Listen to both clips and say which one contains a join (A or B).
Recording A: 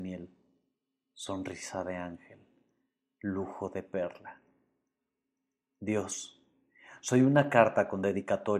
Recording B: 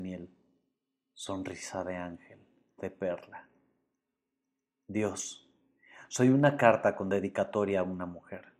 B